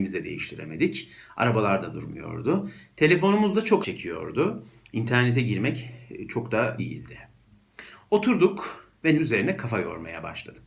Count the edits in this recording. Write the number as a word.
three